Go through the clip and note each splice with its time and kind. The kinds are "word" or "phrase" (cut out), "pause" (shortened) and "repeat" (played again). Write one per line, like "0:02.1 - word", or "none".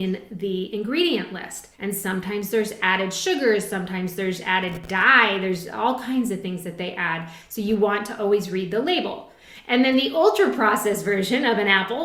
0:01.7 - pause